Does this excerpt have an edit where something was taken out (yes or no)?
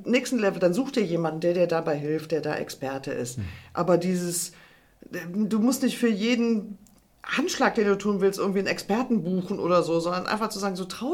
no